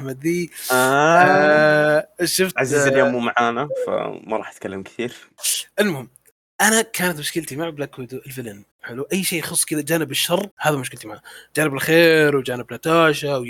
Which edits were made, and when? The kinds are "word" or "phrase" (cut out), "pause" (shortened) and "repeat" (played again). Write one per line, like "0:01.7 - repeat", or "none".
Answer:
0:05.7 - pause
0:08.7 - pause
0:10.5 - pause